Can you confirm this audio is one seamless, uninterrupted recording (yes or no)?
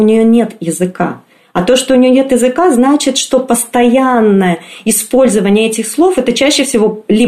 yes